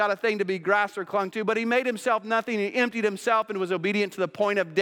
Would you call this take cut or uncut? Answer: uncut